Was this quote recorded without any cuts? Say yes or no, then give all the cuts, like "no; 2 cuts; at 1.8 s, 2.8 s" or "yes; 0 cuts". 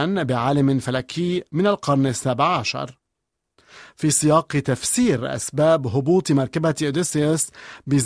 yes; 0 cuts